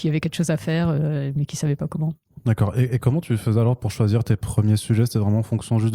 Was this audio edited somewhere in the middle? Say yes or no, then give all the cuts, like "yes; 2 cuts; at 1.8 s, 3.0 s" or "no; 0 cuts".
no; 0 cuts